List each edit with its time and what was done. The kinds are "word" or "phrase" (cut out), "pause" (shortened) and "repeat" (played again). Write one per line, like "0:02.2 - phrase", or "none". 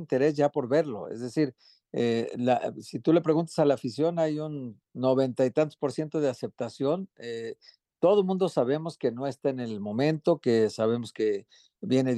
0:04.8 - pause